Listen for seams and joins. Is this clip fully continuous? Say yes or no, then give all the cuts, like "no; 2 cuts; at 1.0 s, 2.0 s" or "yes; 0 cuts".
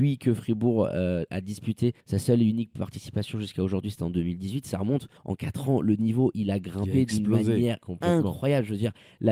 no; 2 cuts; at 2.0 s, 5.2 s